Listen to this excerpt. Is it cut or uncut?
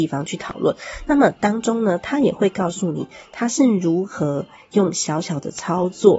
uncut